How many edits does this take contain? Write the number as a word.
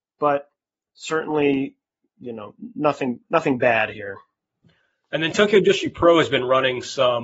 zero